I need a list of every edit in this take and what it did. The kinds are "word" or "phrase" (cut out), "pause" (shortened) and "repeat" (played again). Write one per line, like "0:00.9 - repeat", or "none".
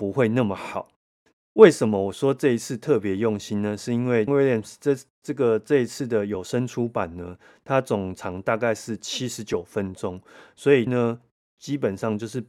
0:04.3 - word
0:10.9 - phrase